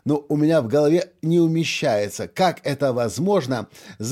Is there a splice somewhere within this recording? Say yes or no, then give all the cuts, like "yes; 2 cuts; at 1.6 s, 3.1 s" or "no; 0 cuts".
no; 0 cuts